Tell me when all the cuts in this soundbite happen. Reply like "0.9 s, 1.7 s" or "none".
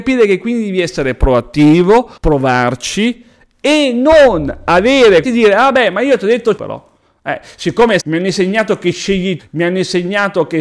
2.2 s, 5.2 s, 6.6 s, 8.0 s, 9.4 s